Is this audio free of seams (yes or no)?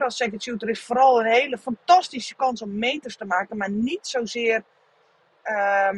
yes